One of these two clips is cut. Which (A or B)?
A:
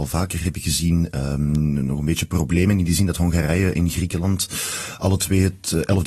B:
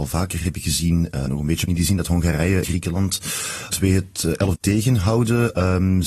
B